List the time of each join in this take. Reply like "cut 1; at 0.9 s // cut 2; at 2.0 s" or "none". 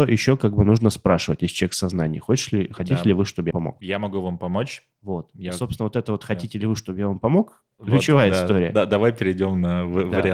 cut 1; at 3.5 s // cut 2; at 7.7 s

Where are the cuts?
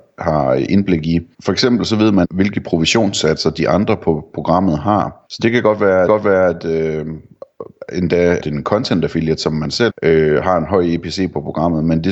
cut 1; at 1.3 s // cut 2; at 2.2 s // cut 3; at 5.3 s // cut 4; at 6.1 s // cut 5; at 8.4 s // cut 6; at 9.9 s

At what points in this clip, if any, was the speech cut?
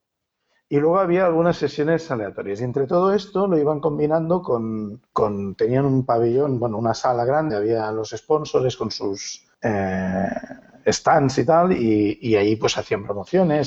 cut 1; at 5.1 s // cut 2; at 7.5 s // cut 3; at 9.5 s

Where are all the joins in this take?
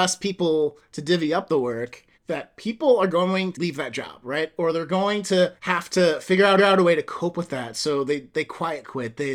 cut 1; at 2.1 s // cut 2; at 3.5 s // cut 3; at 5.6 s // cut 4; at 6.6 s

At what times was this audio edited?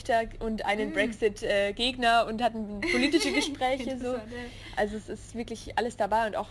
none

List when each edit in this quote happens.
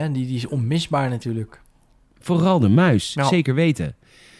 none

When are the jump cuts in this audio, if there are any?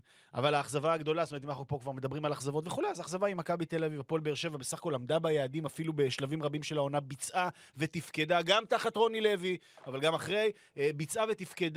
none

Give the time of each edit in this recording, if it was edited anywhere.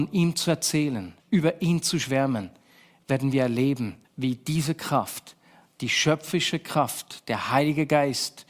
cut 1; at 1.2 s // cut 2; at 4.0 s

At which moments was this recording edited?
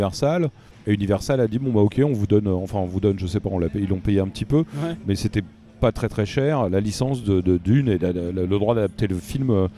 none

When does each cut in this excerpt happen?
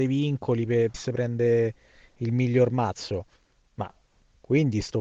cut 1; at 0.9 s

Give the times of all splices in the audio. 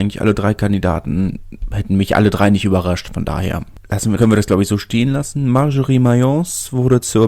cut 1; at 4.2 s

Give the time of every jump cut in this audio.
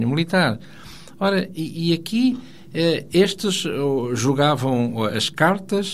none

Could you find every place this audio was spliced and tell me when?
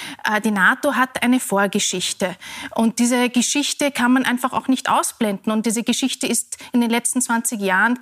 none

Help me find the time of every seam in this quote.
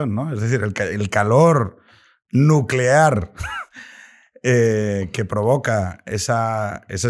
none

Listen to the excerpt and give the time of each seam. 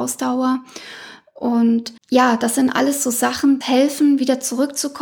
cut 1; at 2.0 s // cut 2; at 3.6 s

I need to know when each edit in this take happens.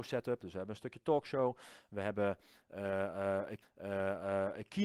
cut 1; at 3.6 s

